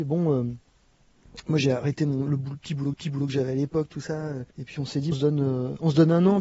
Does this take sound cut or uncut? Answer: cut